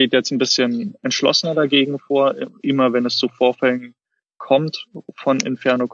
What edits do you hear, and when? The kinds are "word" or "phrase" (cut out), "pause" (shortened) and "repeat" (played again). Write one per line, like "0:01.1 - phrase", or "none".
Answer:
none